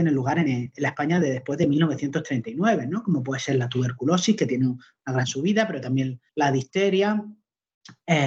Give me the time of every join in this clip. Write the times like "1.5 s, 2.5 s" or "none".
6.3 s